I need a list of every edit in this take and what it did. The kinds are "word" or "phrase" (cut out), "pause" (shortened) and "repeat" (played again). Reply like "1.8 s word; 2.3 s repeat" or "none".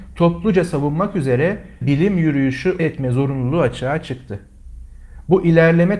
1.8 s word; 2.8 s word